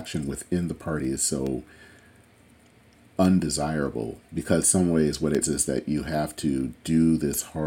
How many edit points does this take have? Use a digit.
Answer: 2